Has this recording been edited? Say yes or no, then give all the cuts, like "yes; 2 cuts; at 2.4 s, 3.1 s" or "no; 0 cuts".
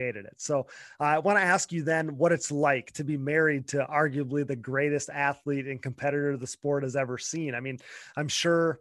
no; 0 cuts